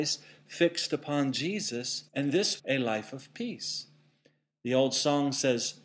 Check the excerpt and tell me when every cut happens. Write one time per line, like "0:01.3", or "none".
0:02.1
0:02.6